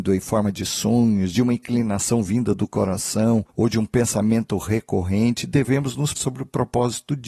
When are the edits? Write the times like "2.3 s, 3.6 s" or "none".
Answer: 6.2 s

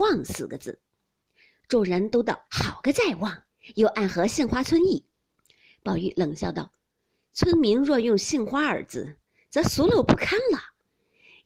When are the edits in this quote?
2.4 s

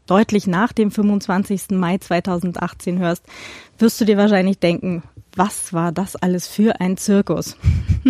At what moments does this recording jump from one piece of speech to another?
none

